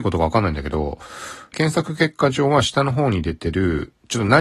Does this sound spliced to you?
yes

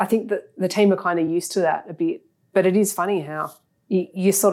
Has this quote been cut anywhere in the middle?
no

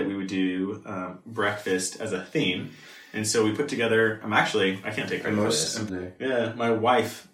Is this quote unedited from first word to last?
no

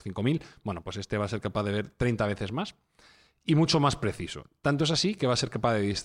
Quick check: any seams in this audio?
no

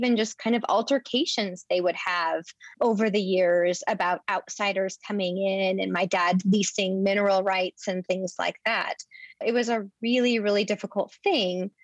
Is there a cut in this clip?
yes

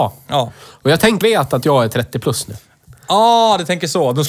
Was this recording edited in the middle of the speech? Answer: yes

